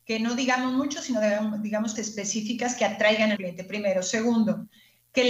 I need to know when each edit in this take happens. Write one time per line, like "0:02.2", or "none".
0:02.0
0:03.4